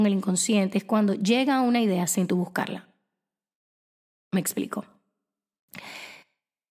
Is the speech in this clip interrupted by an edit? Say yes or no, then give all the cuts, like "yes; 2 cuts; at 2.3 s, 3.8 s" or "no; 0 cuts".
no; 0 cuts